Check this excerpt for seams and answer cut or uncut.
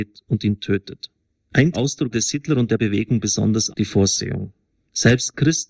cut